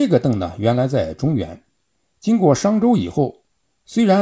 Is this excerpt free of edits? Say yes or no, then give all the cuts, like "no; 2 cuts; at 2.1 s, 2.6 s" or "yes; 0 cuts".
yes; 0 cuts